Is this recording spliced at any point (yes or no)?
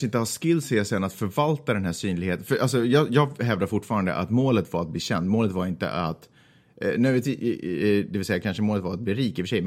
no